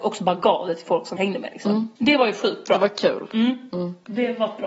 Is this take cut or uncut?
cut